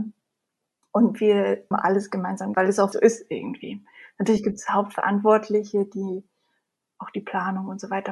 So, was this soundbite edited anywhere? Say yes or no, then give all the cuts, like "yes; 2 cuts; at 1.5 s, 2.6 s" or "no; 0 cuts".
yes; 3 cuts; at 1.7 s, 2.5 s, 2.9 s